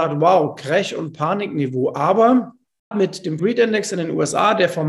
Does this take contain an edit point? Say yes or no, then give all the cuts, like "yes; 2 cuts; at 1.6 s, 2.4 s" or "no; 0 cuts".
yes; 2 cuts; at 2.9 s, 3.4 s